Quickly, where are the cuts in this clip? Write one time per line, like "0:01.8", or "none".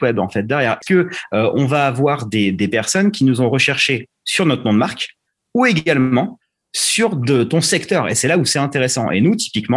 none